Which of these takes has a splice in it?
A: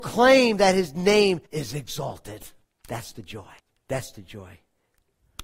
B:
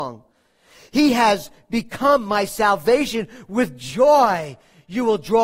A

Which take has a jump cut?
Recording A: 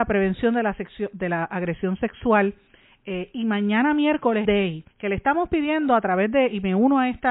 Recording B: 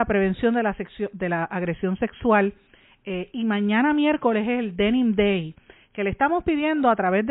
A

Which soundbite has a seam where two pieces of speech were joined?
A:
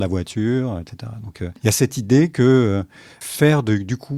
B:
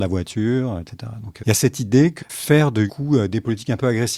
B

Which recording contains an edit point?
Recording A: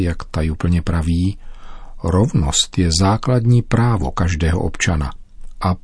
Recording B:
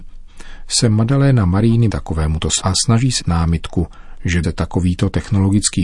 B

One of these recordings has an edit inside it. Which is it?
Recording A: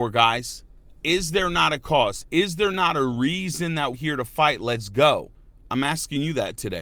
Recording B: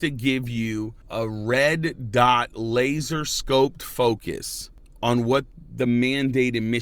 A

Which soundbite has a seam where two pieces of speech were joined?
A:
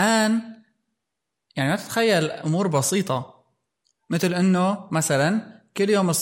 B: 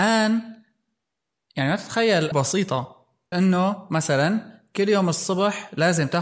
B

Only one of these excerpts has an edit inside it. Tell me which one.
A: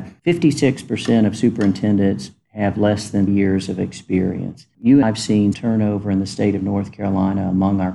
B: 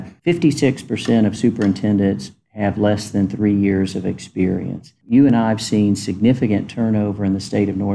A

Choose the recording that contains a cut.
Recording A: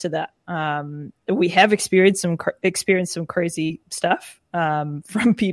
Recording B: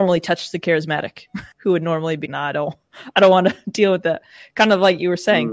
B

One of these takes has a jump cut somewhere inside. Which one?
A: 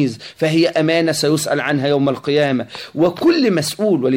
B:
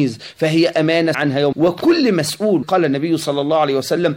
B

